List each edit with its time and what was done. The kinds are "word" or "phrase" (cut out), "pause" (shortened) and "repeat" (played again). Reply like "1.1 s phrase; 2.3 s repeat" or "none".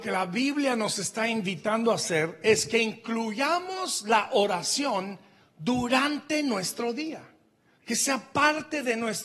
none